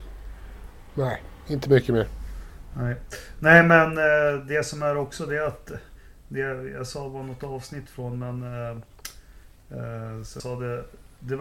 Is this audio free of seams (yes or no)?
no